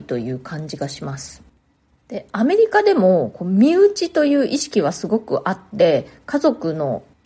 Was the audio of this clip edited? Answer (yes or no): no